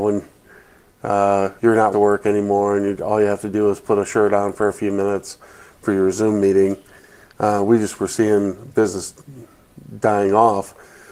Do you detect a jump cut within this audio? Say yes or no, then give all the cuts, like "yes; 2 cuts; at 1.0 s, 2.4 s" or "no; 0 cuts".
yes; 2 cuts; at 1.6 s, 1.9 s